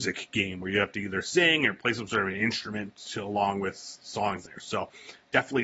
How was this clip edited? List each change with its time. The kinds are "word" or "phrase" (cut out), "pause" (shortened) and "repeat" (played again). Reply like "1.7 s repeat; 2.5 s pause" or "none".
4.5 s phrase